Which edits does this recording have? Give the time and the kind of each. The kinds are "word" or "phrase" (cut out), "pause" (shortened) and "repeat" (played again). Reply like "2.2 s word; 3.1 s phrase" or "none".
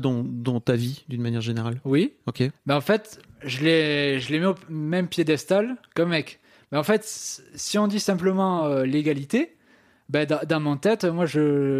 none